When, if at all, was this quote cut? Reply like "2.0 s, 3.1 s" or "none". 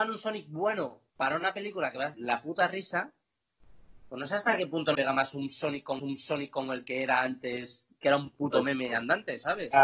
1.1 s, 2.1 s, 4.9 s, 6.0 s, 7.9 s